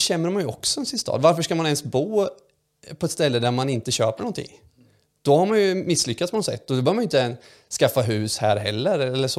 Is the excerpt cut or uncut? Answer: uncut